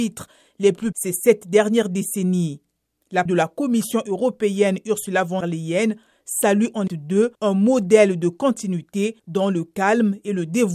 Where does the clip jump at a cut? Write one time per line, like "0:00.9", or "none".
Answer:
0:00.9
0:03.3
0:05.4
0:06.9
0:07.3
0:09.2